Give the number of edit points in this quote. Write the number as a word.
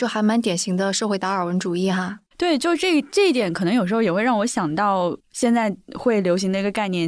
two